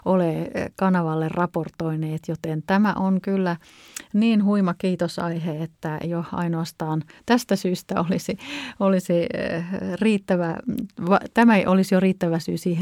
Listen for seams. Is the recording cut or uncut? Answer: uncut